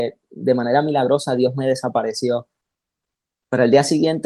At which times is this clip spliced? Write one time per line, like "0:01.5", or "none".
none